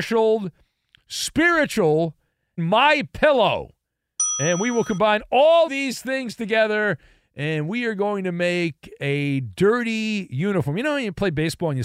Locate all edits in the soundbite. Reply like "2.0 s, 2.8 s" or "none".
2.6 s, 5.7 s